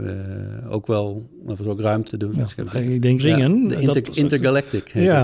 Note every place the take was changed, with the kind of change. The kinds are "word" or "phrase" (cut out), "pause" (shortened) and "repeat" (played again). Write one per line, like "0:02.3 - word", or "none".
0:02.1 - phrase
0:03.2 - phrase